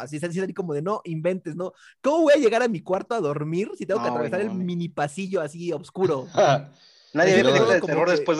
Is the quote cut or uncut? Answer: uncut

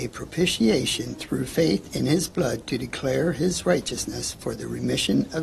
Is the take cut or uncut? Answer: uncut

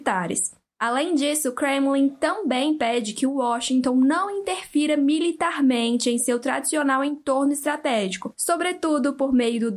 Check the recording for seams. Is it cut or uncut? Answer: uncut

